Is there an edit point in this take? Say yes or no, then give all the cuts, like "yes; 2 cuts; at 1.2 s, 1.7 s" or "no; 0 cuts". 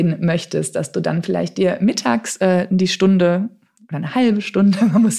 no; 0 cuts